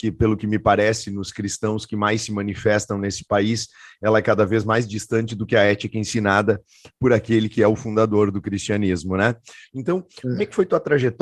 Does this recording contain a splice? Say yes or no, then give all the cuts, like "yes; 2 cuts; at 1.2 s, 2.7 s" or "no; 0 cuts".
no; 0 cuts